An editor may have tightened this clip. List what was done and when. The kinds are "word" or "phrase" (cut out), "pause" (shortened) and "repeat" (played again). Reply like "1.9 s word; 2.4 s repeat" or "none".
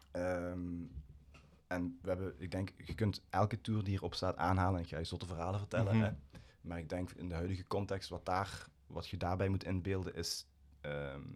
none